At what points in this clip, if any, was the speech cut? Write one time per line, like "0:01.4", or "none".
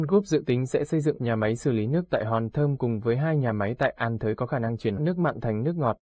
0:01.2
0:05.0